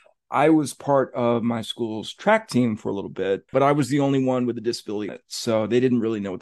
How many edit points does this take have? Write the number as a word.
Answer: two